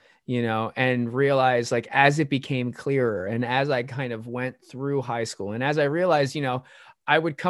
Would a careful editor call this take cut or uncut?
uncut